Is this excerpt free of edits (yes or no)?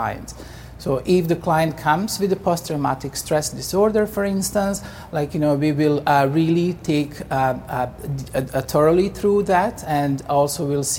yes